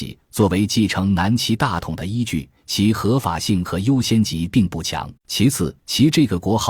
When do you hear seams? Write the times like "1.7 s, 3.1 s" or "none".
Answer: 2.6 s, 5.2 s, 5.8 s